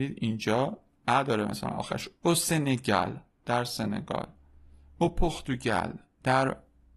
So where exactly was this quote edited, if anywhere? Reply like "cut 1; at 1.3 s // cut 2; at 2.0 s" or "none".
none